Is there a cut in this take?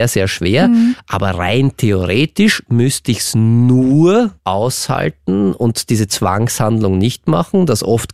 yes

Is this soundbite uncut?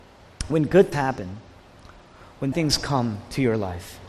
no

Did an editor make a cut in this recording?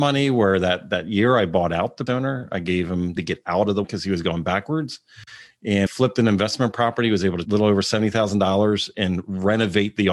yes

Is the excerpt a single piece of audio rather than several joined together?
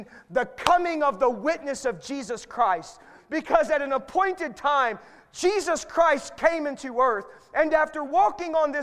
yes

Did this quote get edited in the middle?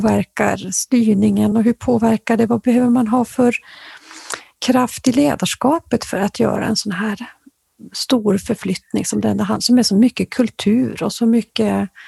no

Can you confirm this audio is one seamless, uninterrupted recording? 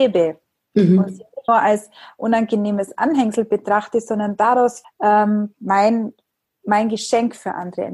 no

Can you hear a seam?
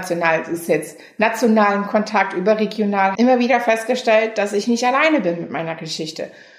yes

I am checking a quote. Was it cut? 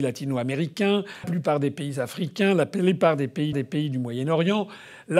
yes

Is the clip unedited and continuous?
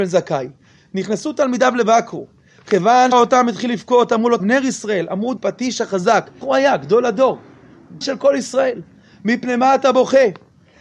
no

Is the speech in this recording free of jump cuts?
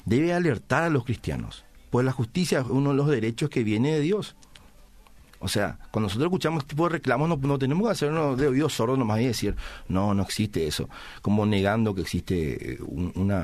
yes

